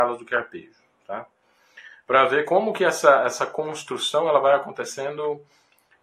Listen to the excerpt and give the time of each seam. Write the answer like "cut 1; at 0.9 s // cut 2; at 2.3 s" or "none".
none